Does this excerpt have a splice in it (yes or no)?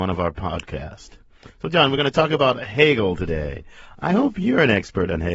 no